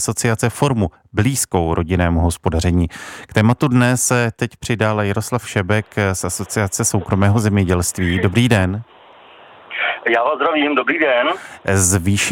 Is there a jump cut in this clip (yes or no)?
no